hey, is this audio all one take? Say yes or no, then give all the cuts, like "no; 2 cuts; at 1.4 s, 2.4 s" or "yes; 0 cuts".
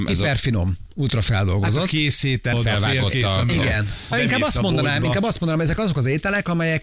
no; 2 cuts; at 2.5 s, 4.1 s